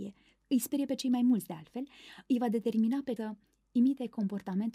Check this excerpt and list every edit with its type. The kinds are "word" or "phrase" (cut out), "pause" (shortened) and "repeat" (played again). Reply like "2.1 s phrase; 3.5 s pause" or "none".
3.2 s word